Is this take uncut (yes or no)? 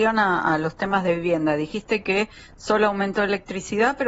yes